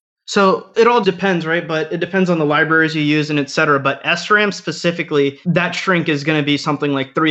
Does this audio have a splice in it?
yes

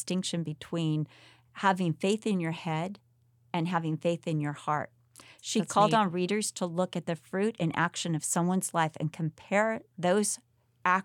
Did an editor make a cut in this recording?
no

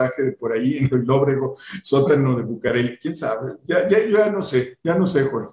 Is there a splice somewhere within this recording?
yes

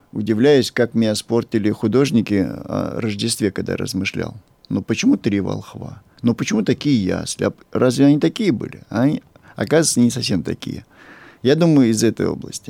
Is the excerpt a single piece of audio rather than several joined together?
yes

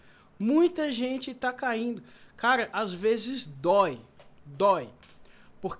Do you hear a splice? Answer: yes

